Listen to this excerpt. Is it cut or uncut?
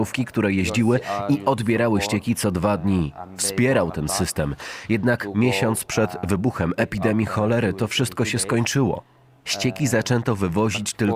uncut